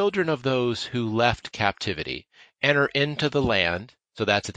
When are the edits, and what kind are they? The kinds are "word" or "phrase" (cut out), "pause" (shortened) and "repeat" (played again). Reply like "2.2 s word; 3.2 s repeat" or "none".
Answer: none